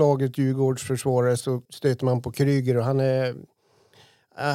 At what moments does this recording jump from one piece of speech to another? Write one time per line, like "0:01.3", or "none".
0:01.6